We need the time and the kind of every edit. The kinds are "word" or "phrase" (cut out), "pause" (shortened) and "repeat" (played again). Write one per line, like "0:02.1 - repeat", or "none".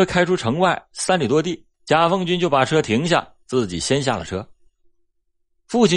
0:01.7 - pause